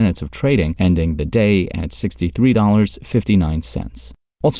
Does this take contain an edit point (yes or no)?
no